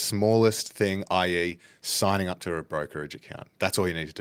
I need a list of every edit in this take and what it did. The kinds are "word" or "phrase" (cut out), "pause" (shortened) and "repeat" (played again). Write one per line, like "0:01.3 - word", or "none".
none